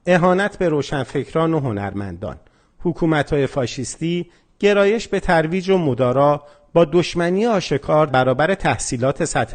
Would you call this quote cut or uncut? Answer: cut